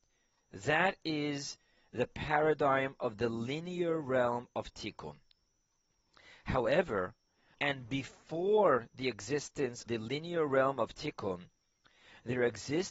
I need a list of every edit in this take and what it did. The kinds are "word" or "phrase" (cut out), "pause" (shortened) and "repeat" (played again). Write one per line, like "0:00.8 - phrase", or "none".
0:07.5 - word
0:09.9 - word